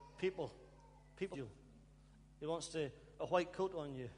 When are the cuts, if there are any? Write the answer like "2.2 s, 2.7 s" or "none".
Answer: 1.3 s, 3.2 s

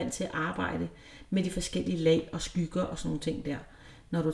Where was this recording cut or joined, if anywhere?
none

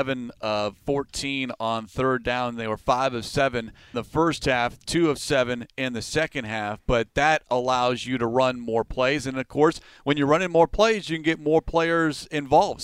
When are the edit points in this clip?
3.9 s

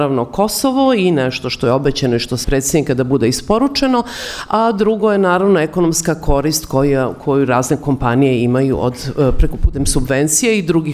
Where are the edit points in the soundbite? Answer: 2.4 s

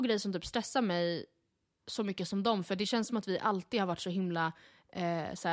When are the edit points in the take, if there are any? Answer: none

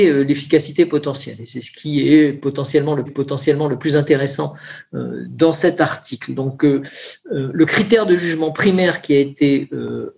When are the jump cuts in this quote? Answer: 3.1 s

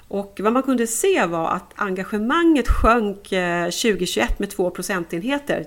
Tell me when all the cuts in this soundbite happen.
none

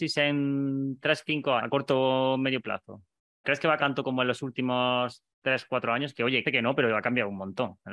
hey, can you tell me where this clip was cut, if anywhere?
1.6 s, 3.4 s, 3.8 s, 6.4 s

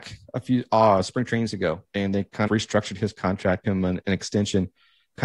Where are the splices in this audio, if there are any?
1.9 s, 2.5 s, 3.6 s

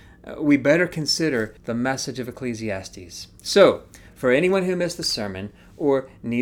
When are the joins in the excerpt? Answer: 1.6 s

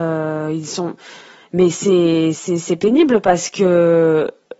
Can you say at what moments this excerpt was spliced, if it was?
none

